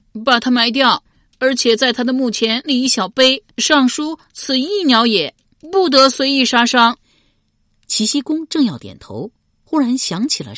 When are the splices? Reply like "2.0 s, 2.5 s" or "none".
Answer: 3.5 s, 7.0 s